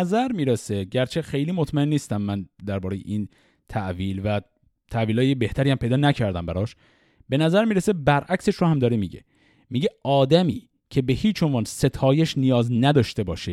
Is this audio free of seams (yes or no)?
yes